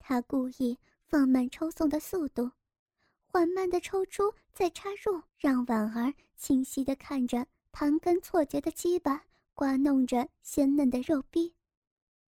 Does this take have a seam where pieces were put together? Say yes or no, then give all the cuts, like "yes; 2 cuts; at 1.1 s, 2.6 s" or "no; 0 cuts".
yes; 1 cut; at 5.3 s